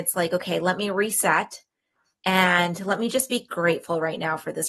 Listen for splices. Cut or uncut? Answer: uncut